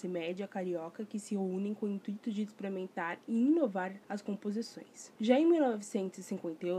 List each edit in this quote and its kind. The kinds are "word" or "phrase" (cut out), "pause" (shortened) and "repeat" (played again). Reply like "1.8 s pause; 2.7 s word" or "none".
4.0 s pause; 5.2 s pause